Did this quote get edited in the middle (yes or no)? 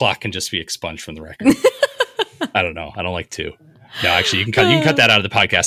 no